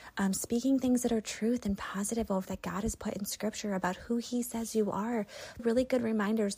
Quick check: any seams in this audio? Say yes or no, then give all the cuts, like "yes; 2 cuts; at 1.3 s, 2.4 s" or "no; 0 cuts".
yes; 2 cuts; at 2.5 s, 5.6 s